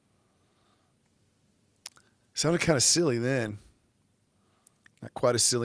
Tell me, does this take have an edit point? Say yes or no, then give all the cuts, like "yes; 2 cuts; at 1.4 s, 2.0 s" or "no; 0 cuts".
no; 0 cuts